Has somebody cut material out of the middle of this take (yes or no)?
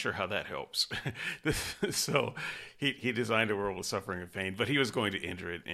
no